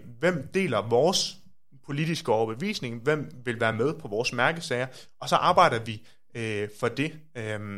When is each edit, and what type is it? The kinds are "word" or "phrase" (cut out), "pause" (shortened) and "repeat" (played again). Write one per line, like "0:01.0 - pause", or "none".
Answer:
none